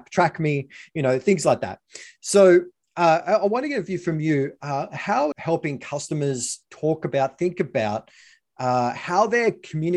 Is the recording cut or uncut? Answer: cut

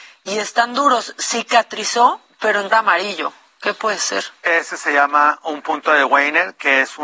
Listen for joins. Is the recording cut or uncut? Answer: cut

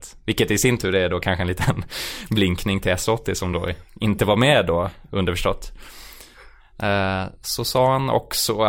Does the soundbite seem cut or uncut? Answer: uncut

